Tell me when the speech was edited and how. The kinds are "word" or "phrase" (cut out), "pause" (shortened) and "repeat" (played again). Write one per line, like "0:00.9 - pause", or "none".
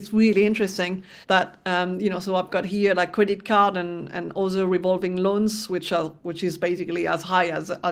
0:01.2 - pause